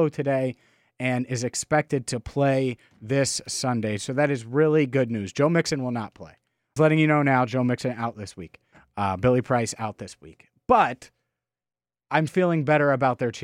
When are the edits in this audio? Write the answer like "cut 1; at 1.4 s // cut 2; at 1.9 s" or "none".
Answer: cut 1; at 6.8 s // cut 2; at 8.7 s // cut 3; at 12.3 s